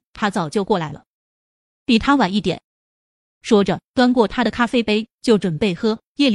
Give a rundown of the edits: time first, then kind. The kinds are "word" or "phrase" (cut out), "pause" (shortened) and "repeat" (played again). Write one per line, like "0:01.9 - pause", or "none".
none